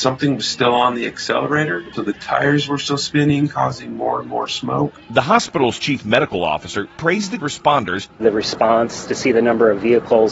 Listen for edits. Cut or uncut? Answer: cut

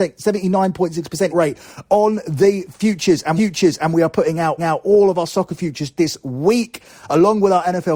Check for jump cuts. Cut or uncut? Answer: cut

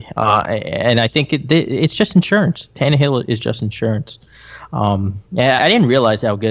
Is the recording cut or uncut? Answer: cut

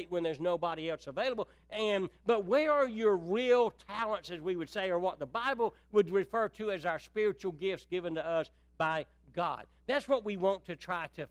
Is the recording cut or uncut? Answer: uncut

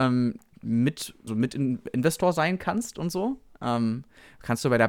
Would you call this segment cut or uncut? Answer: cut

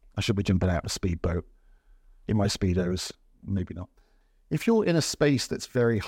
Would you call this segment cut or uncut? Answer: uncut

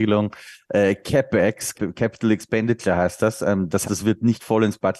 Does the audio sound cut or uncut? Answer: cut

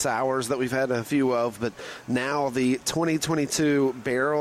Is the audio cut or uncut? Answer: uncut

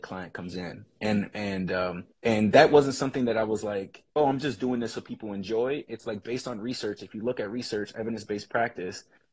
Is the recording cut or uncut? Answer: cut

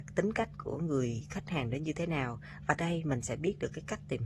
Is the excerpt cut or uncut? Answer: cut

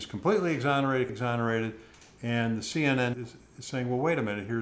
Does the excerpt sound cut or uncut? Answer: cut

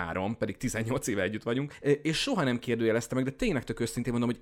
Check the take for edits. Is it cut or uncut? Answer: uncut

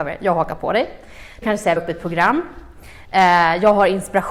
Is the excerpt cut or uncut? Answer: cut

